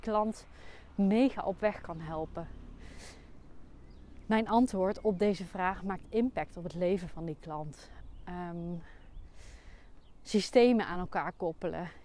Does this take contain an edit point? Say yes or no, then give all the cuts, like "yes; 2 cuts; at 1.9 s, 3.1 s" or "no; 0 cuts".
no; 0 cuts